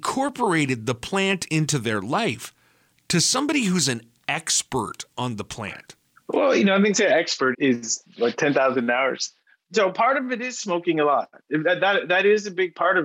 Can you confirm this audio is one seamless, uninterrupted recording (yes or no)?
no